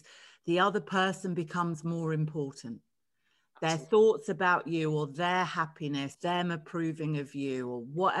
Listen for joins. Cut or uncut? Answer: cut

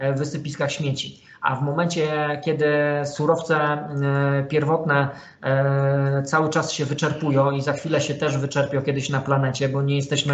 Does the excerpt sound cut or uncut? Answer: uncut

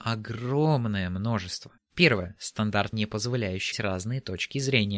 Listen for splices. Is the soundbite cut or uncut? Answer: cut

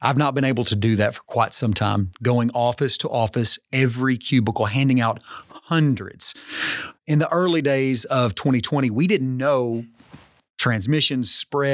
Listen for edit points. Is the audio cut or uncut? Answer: uncut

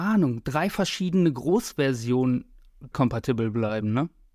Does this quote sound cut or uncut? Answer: cut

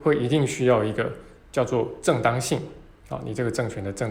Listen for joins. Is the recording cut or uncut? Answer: cut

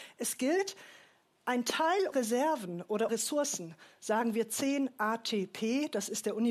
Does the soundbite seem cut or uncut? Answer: cut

